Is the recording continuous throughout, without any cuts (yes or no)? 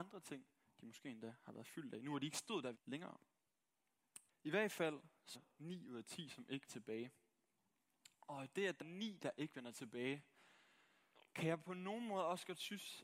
no